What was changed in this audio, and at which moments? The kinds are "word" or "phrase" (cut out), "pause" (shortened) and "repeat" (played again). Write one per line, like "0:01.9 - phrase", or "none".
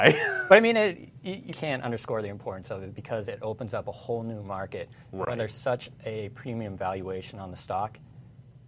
0:01.5 - word